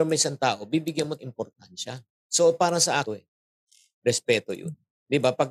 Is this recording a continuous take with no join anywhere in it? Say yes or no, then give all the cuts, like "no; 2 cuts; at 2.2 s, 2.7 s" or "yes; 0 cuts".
no; 2 cuts; at 1.2 s, 3.1 s